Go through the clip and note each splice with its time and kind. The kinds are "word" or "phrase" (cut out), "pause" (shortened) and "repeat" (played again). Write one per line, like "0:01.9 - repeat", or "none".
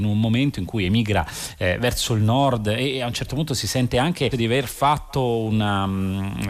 0:04.3 - word